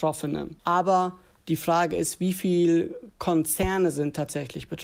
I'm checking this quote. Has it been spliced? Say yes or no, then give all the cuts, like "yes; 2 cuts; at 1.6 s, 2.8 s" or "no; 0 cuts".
no; 0 cuts